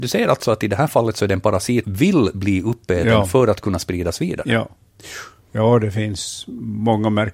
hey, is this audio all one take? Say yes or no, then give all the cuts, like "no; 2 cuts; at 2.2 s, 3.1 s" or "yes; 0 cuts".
no; 1 cut; at 1.8 s